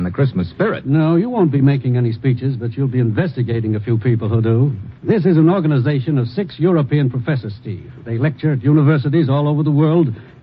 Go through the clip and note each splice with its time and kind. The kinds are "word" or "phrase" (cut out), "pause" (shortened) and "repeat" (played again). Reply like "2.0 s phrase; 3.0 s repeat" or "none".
5.0 s pause